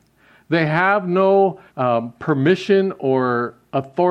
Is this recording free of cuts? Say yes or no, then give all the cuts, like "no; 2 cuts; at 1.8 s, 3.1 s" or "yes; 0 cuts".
no; 1 cut; at 1.7 s